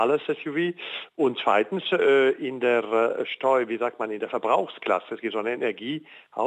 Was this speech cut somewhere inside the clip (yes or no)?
no